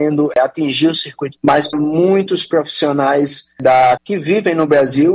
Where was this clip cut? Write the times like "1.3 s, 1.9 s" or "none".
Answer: 1.4 s, 1.7 s, 4.0 s